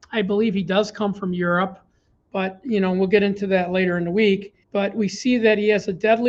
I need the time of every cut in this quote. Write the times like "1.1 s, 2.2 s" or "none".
4.6 s